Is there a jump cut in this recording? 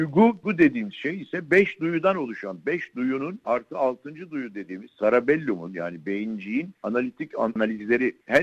no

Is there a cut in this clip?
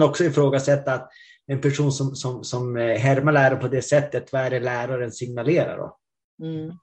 no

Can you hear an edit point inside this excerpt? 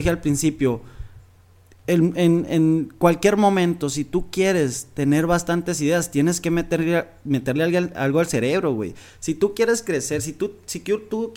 no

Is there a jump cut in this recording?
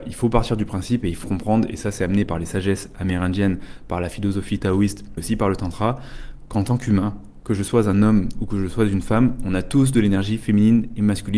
yes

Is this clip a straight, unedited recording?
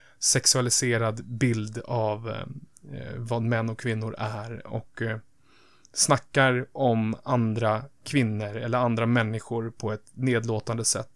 yes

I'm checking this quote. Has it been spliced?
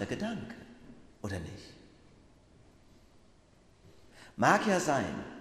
no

